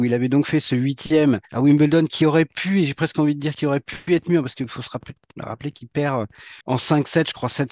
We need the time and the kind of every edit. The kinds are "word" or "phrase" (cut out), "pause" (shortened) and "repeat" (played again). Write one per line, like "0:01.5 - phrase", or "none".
0:01.5 - pause
0:06.6 - pause